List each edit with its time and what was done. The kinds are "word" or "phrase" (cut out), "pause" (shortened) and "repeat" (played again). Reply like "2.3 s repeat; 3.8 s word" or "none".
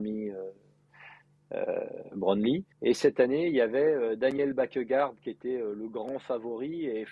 2.7 s pause